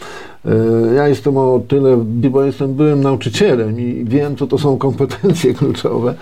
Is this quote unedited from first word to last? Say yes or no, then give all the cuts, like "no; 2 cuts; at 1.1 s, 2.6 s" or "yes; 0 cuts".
no; 1 cut; at 2.2 s